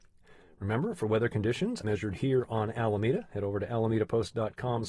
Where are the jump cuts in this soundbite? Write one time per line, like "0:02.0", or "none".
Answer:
0:01.8

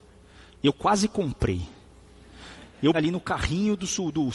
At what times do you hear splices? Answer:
0:02.9

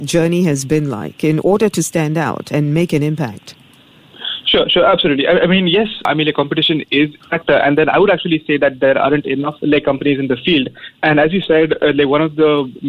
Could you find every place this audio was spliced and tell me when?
0:09.6

